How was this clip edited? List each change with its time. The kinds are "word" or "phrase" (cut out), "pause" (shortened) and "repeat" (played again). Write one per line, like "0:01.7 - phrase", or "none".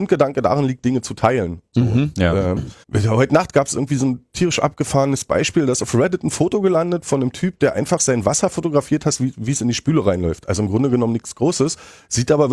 0:02.8 - pause